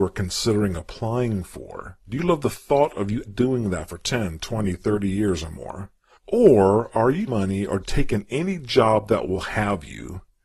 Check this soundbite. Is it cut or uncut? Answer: cut